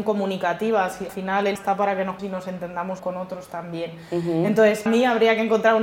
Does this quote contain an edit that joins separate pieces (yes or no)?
yes